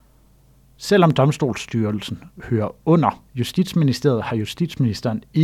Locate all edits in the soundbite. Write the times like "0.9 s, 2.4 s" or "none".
3.3 s